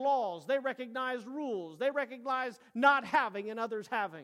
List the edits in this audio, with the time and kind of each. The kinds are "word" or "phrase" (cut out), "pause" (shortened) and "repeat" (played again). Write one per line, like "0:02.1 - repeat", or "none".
none